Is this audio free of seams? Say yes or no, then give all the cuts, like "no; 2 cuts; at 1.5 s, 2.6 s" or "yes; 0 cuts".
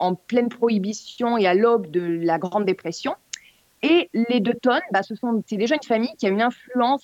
yes; 0 cuts